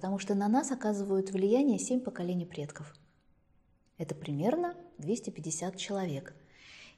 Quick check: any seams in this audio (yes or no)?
no